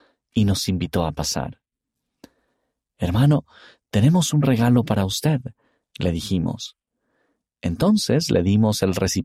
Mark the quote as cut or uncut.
uncut